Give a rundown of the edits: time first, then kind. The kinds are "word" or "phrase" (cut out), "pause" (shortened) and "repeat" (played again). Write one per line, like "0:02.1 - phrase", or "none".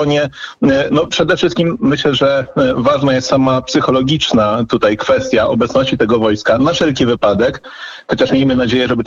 none